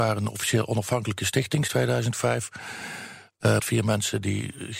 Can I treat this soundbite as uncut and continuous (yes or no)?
no